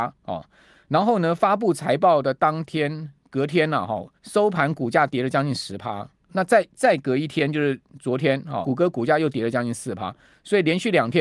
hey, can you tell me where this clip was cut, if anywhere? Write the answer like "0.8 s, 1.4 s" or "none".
4.2 s, 6.3 s, 6.7 s, 8.6 s